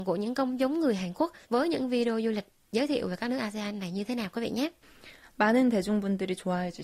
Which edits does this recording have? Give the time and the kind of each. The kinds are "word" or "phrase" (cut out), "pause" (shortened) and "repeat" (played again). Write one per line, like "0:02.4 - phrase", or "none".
0:01.4 - pause